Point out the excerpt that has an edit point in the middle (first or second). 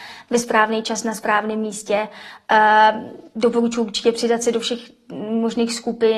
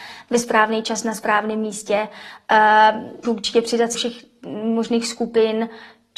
second